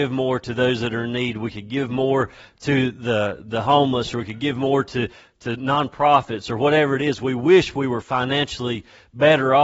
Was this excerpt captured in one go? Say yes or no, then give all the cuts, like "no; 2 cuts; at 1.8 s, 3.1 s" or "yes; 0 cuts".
yes; 0 cuts